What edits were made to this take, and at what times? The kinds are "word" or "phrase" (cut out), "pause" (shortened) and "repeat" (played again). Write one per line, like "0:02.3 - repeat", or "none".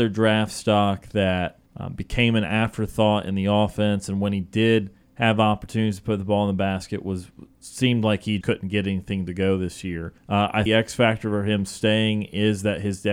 0:01.7 - pause
0:05.0 - pause
0:08.4 - word
0:10.2 - pause
0:10.7 - phrase